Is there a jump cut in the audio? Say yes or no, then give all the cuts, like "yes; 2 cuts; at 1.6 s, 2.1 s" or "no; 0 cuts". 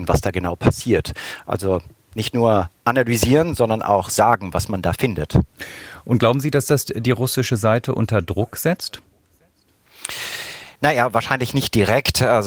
yes; 1 cut; at 10.8 s